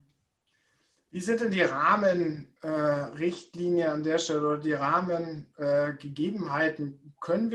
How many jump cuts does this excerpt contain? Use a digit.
0